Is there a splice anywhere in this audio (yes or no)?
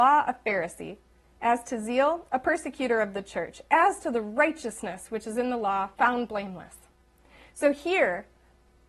yes